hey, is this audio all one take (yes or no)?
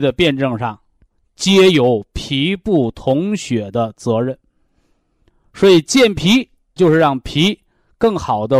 no